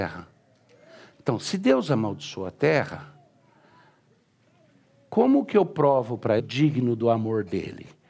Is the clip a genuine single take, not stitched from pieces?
no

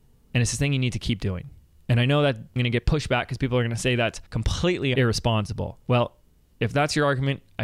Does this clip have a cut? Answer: yes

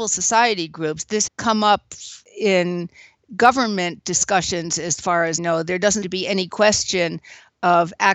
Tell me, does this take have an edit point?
yes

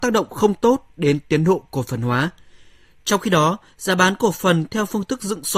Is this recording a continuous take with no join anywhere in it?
yes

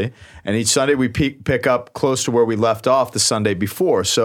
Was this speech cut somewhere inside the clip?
no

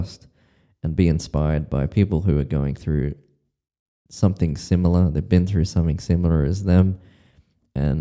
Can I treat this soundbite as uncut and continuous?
yes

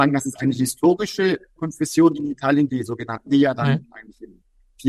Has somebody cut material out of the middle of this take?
yes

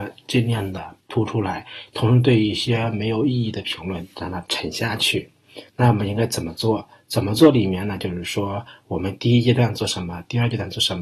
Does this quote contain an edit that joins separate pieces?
yes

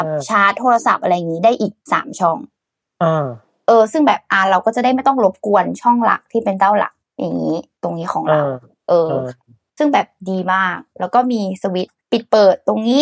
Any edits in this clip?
yes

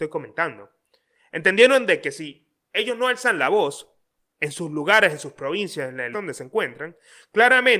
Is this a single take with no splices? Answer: no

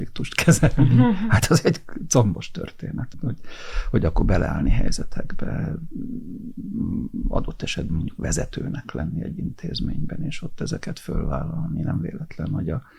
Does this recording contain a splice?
yes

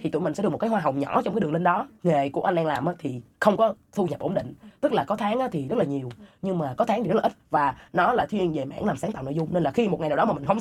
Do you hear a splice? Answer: no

